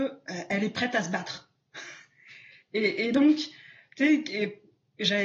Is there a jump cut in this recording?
no; 0 cuts

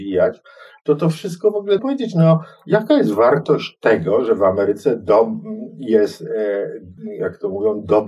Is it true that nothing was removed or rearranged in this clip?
no; 1 cut; at 1.8 s

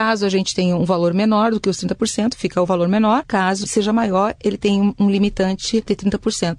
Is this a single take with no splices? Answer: yes; 0 cuts

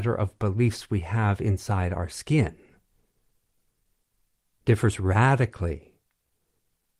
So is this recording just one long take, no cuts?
yes; 0 cuts

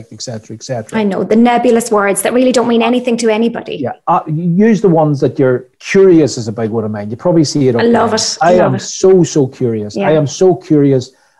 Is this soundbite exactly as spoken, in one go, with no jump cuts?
no; 1 cut; at 5.7 s

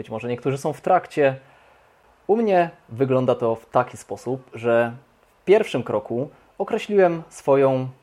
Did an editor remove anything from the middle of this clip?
no; 0 cuts

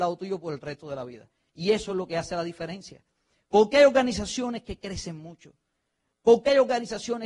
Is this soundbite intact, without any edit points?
yes; 0 cuts

